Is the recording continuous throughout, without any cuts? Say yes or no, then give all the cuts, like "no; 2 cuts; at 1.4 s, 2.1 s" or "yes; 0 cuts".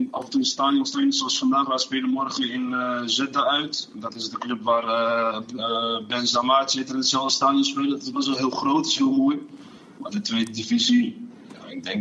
yes; 0 cuts